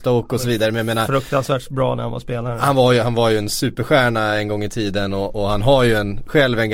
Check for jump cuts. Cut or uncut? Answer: uncut